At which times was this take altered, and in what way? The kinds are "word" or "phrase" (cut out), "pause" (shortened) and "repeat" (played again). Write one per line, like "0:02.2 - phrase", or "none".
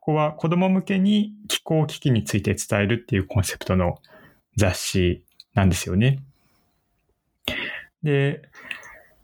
none